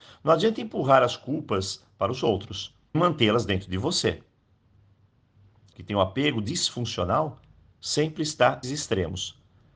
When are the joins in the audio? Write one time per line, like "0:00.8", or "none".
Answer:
0:02.9
0:05.7
0:08.6